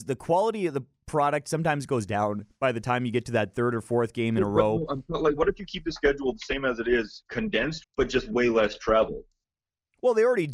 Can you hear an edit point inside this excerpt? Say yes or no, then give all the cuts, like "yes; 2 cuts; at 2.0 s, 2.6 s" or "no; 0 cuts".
yes; 1 cut; at 7.8 s